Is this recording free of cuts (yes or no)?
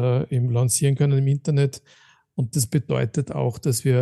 yes